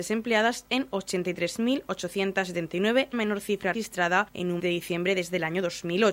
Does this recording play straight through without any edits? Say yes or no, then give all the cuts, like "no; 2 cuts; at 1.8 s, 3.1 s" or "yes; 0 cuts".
no; 3 cuts; at 3.1 s, 3.7 s, 4.6 s